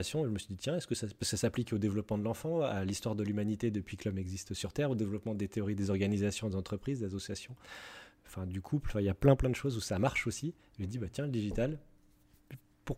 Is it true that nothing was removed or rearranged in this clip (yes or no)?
yes